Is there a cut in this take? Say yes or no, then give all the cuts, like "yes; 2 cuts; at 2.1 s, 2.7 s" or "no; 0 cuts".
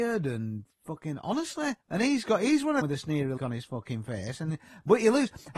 yes; 3 cuts; at 1.8 s, 2.8 s, 3.4 s